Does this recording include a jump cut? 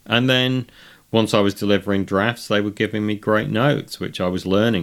no; 0 cuts

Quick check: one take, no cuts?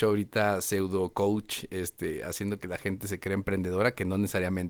yes; 0 cuts

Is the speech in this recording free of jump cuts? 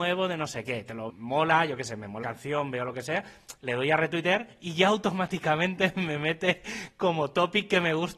no; 2 cuts; at 1.1 s, 2.2 s

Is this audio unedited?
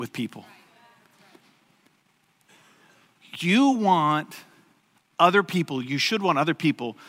yes; 0 cuts

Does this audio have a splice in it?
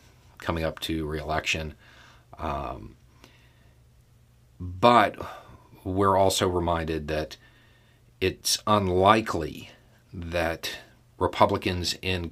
no; 0 cuts

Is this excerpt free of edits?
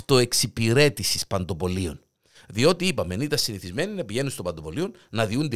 yes; 0 cuts

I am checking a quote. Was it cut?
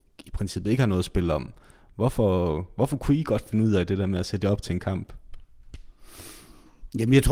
no; 0 cuts

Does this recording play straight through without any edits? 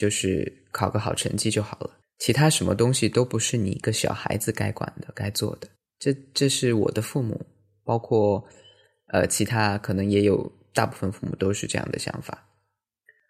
no; 2 cuts; at 2.0 s, 5.8 s

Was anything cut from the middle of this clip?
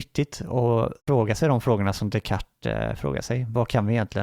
yes; 1 cut; at 1.0 s

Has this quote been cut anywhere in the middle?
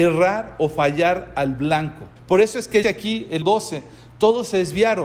yes; 3 cuts; at 2.2 s, 2.8 s, 3.4 s

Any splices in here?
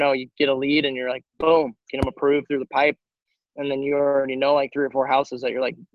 no; 0 cuts

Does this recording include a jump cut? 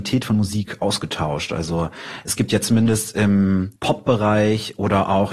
yes; 1 cut; at 3.8 s

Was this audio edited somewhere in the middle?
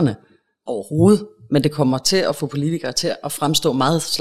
no; 0 cuts

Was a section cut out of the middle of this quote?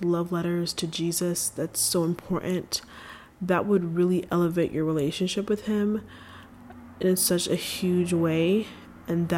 no; 0 cuts

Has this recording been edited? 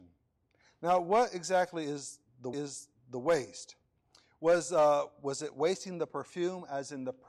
yes; 1 cut; at 2.5 s

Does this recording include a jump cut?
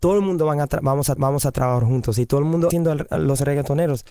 yes; 2 cuts; at 1.2 s, 2.7 s

